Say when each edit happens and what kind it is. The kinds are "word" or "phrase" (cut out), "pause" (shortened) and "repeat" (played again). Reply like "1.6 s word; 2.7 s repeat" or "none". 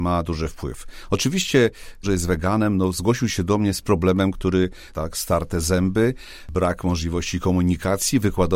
2.0 s phrase; 4.9 s phrase